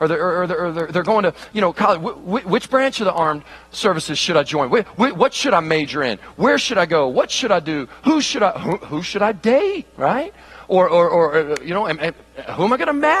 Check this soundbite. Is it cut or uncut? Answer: uncut